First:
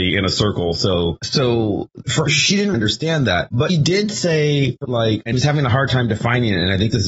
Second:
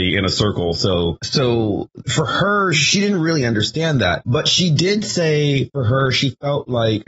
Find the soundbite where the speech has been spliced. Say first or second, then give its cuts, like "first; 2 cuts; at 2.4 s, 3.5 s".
first; 5 cuts; at 2.3 s, 2.7 s, 3.7 s, 4.8 s, 5.3 s